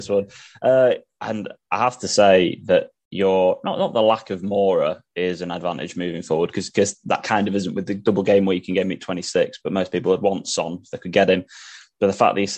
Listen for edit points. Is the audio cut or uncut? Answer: uncut